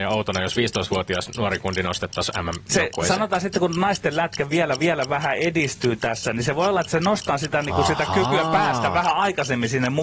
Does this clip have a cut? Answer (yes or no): yes